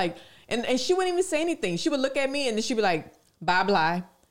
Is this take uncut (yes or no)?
yes